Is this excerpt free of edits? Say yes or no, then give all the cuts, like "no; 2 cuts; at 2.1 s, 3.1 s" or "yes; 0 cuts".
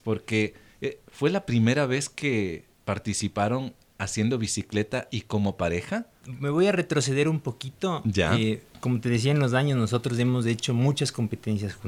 no; 1 cut; at 2.7 s